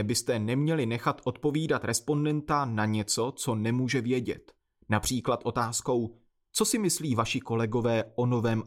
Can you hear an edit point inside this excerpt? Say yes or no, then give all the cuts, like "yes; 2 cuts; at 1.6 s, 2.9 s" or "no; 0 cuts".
no; 0 cuts